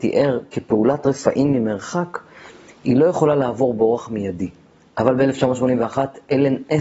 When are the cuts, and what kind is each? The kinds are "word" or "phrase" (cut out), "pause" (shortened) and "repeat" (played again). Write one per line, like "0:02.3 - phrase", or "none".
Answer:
none